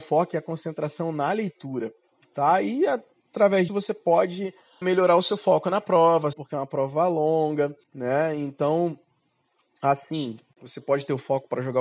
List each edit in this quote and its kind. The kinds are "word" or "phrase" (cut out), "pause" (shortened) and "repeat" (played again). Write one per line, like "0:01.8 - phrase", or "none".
0:03.7 - word
0:04.8 - word
0:06.3 - phrase
0:07.8 - pause